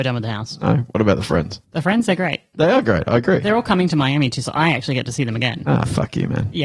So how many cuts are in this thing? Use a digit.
1